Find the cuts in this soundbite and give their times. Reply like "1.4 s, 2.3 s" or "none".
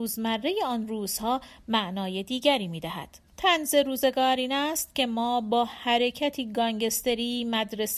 3.3 s